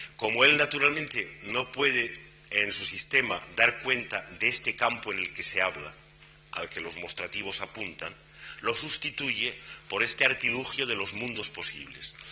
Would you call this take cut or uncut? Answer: uncut